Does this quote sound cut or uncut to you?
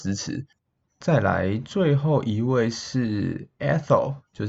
uncut